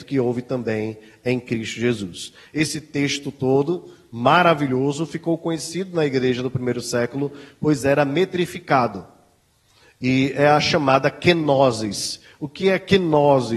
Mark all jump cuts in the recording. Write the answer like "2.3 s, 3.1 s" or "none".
none